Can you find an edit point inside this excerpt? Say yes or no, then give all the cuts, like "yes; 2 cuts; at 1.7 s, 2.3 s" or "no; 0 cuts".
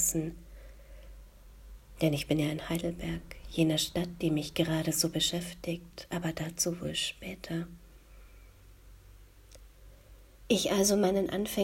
no; 0 cuts